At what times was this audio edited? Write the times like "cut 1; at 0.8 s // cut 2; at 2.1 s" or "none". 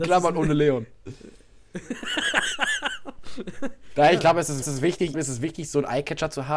cut 1; at 4.6 s // cut 2; at 5.1 s